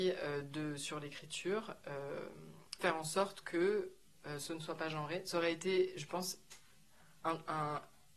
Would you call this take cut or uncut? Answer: cut